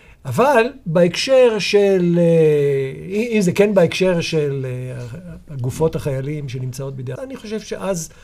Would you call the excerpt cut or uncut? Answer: cut